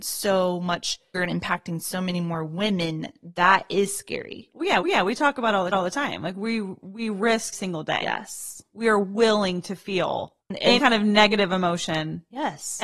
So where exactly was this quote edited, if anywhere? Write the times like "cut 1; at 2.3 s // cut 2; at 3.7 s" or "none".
cut 1; at 1.1 s // cut 2; at 4.8 s // cut 3; at 5.7 s // cut 4; at 7.5 s // cut 5; at 10.4 s // cut 6; at 10.8 s